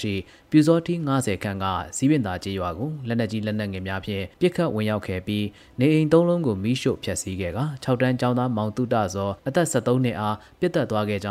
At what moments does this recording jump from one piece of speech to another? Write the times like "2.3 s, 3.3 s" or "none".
4.3 s

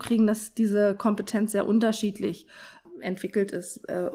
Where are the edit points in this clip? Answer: none

